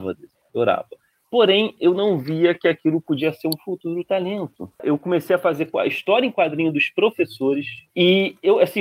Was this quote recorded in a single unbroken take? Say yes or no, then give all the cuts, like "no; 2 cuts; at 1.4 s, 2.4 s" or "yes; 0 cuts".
yes; 0 cuts